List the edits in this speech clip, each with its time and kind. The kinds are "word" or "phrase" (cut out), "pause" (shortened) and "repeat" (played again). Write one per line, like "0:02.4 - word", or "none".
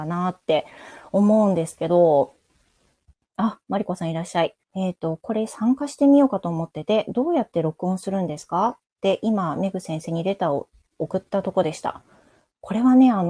0:04.6 - pause